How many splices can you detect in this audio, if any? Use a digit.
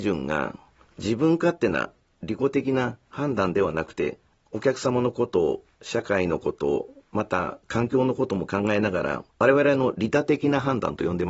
1